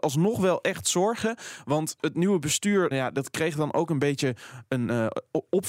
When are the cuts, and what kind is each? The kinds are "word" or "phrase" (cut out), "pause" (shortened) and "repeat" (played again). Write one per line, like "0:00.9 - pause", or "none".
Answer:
0:02.9 - word